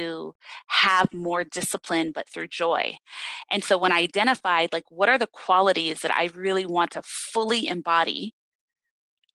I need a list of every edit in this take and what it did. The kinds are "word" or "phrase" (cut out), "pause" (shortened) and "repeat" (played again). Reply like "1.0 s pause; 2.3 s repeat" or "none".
none